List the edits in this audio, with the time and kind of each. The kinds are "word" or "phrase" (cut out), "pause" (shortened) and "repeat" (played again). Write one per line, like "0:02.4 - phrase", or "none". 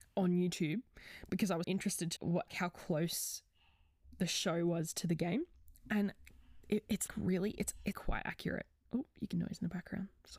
0:01.6 - word
0:02.2 - word
0:02.5 - word
0:07.1 - word
0:07.9 - word
0:09.3 - word

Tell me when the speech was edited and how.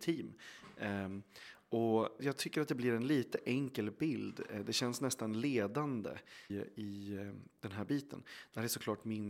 0:02.2 - word
0:06.5 - word

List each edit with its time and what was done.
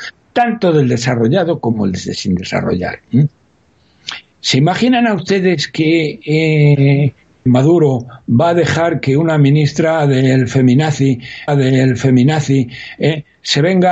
0:03.0 - pause
0:07.5 - word
0:11.5 - repeat

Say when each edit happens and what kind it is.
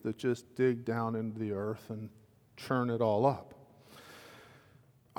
none

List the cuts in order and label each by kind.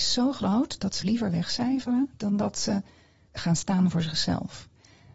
0:01.0 - word

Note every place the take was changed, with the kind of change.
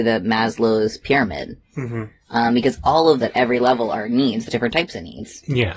0:03.2 - word
0:04.5 - word

